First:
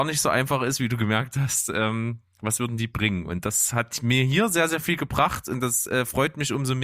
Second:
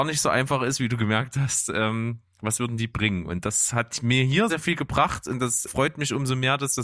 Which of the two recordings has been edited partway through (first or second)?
second